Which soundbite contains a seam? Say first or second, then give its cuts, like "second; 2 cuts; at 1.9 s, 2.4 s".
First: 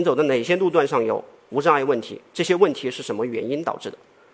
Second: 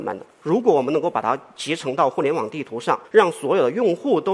second; 1 cut; at 3.0 s